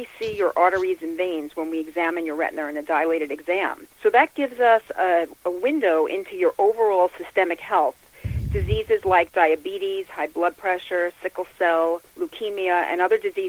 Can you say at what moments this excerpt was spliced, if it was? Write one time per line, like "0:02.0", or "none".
0:03.9
0:12.1